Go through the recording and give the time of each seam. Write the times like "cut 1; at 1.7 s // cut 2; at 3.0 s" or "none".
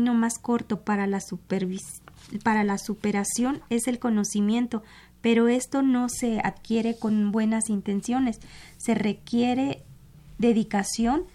none